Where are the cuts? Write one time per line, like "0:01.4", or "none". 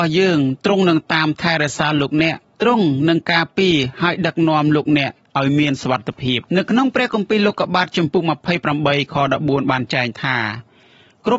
0:02.4
0:06.5

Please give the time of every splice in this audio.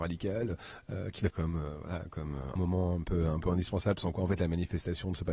0:01.3
0:02.6

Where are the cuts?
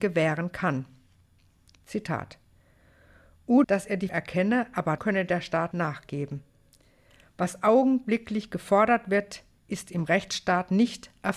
0:03.6
0:04.1
0:05.0
0:05.7

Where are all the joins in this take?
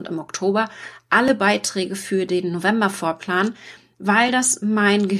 none

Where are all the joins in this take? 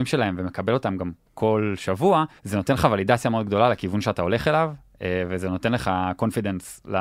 0:02.4

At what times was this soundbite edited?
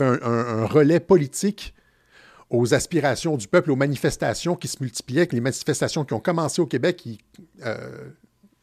none

